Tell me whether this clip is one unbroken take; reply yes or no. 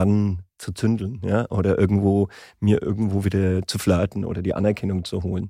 yes